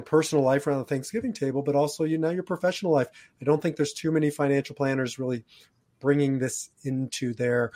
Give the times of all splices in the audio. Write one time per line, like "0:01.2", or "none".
none